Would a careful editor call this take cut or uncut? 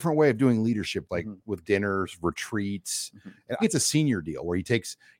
cut